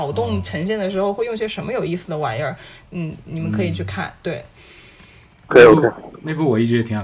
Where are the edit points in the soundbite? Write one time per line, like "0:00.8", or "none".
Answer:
none